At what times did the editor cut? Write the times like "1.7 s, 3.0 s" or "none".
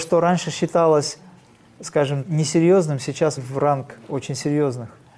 2.2 s, 3.4 s